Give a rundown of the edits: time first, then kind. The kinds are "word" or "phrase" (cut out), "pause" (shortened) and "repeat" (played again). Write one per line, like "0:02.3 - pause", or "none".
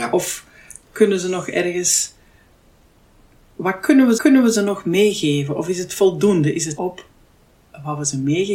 0:04.2 - repeat
0:06.8 - word